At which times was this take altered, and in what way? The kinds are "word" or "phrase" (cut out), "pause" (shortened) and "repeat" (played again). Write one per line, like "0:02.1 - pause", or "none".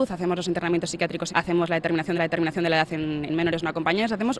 0:01.3 - word
0:02.1 - repeat
0:03.3 - word